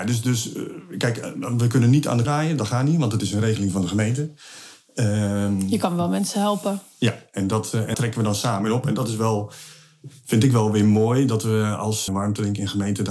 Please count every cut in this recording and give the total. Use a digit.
3